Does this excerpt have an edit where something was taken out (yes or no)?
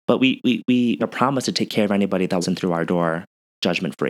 yes